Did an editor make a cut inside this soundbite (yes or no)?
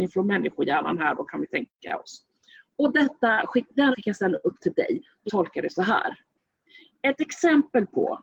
yes